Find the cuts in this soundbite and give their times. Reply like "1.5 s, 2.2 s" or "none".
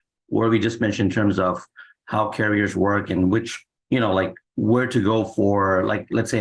4.4 s